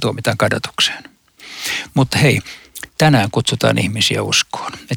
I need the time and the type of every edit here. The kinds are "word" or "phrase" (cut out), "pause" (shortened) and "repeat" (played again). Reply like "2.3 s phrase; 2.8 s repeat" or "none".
2.9 s pause